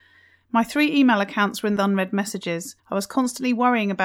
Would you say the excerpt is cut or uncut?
cut